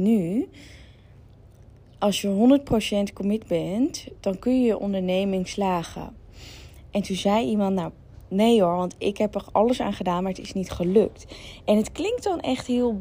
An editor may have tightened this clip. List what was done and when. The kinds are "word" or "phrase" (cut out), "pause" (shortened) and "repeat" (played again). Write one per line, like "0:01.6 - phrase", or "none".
none

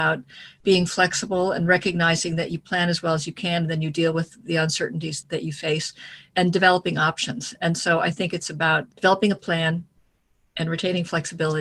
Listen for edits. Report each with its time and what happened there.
none

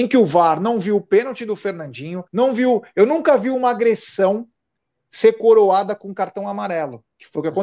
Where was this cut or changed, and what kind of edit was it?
0:02.3 - pause

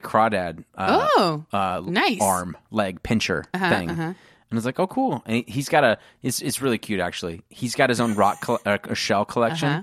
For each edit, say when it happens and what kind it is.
none

